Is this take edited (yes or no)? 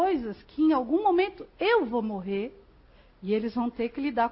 no